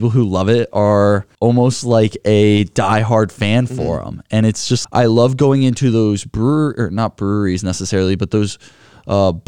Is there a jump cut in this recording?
yes; 2 cuts; at 1.3 s, 4.8 s

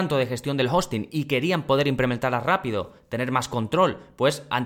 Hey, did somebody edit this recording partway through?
no; 0 cuts

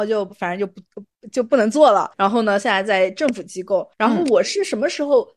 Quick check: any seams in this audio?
yes; 2 cuts; at 2.1 s, 3.9 s

